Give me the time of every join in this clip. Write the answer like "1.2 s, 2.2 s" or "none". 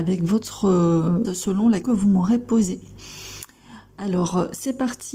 1.2 s, 1.8 s